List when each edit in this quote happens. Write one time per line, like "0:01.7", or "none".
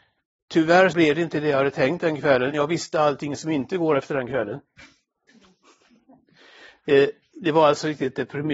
0:00.9
0:02.5

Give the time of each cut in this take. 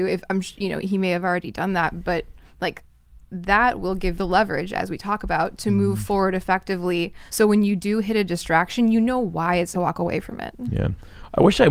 0:02.4
0:04.1
0:07.3
0:09.7

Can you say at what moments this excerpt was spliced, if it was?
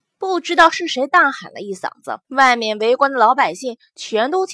0:02.2

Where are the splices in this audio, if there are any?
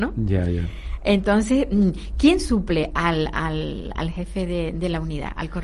none

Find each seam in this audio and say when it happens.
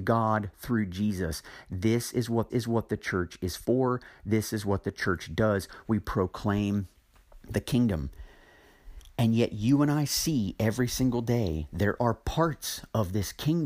0:02.5

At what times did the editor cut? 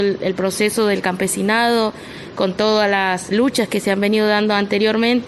0:03.3

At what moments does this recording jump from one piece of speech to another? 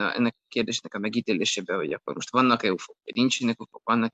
none

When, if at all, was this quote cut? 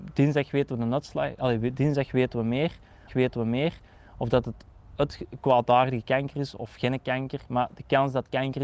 0:03.1

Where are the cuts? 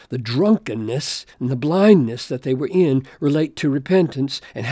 0:01.3

